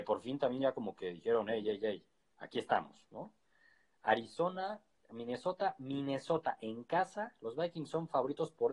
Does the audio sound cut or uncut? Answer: uncut